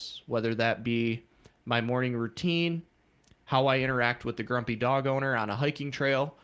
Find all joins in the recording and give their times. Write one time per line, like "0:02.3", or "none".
none